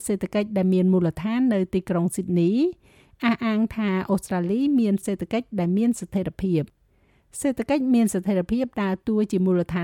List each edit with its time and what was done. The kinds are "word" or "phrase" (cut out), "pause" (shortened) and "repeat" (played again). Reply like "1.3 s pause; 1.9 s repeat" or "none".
none